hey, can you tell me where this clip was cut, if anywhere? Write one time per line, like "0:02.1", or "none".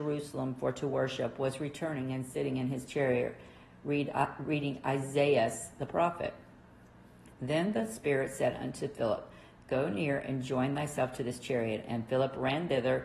none